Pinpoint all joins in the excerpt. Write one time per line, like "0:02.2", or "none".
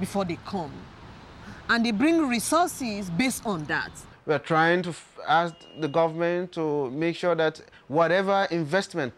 none